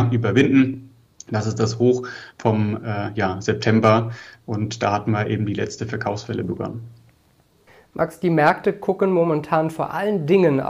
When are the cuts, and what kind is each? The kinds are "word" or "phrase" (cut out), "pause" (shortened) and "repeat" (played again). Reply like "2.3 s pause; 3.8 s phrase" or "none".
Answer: none